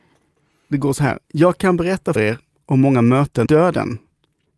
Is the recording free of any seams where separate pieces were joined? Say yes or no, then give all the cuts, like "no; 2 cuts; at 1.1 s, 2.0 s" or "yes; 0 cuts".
no; 3 cuts; at 1.2 s, 2.2 s, 3.5 s